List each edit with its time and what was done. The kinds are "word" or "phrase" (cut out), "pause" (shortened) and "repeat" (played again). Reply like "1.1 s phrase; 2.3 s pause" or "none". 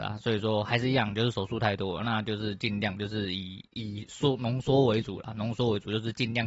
3.7 s pause